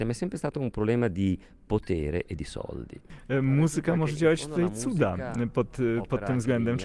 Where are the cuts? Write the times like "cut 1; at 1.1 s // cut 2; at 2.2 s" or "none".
none